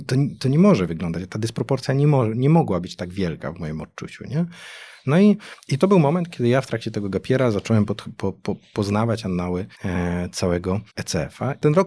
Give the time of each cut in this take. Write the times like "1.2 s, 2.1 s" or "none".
9.7 s, 10.9 s